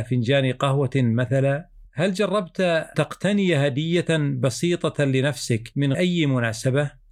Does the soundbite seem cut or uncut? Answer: cut